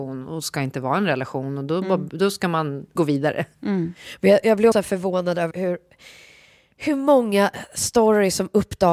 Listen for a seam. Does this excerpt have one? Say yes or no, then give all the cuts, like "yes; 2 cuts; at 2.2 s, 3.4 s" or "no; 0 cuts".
yes; 4 cuts; at 3.0 s, 3.5 s, 4.7 s, 5.5 s